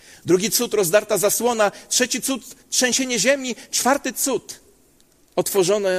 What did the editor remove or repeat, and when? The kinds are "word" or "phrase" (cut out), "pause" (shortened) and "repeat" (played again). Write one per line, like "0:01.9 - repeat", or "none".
none